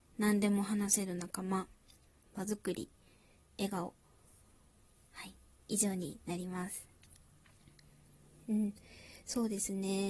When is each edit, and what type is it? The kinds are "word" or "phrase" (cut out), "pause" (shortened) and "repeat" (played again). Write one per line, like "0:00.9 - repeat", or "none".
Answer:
none